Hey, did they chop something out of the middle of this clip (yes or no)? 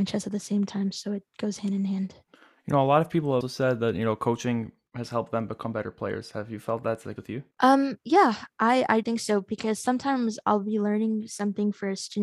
yes